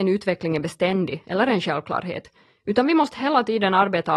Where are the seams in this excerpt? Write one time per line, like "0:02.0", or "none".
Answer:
none